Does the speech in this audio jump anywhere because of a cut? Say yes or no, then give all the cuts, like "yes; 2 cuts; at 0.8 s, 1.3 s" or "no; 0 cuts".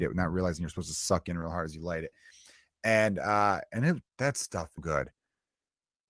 yes; 2 cuts; at 4.1 s, 4.8 s